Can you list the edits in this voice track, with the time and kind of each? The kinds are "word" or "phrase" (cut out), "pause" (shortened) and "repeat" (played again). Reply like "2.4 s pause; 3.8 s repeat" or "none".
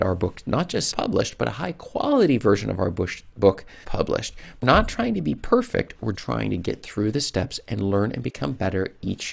0.9 s word; 3.8 s word; 4.6 s word; 6.1 s word